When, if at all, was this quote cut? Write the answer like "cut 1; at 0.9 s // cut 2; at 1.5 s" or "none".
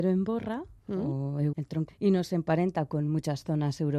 cut 1; at 1.5 s // cut 2; at 1.9 s